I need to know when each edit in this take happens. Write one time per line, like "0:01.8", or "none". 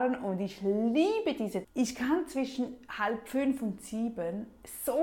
0:01.6